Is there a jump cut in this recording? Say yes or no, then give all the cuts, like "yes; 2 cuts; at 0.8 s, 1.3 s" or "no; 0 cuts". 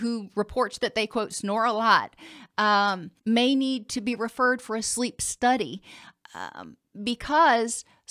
yes; 1 cut; at 3.2 s